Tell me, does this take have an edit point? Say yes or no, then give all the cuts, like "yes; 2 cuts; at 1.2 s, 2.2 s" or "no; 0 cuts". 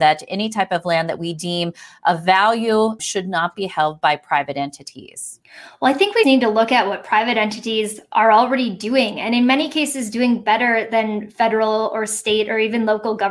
yes; 2 cuts; at 3.0 s, 6.2 s